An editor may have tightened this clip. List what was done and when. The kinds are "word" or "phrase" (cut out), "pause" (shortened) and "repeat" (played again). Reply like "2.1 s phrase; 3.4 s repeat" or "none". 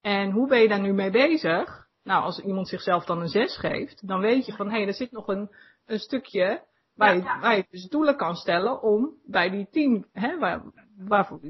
none